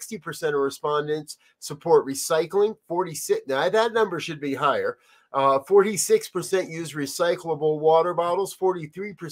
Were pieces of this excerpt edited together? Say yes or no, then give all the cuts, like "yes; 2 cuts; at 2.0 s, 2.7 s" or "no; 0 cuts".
no; 0 cuts